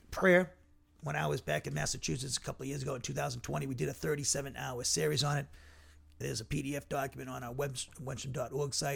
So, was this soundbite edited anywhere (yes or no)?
no